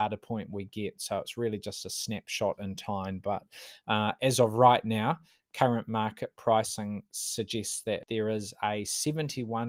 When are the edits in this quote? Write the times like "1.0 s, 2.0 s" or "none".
none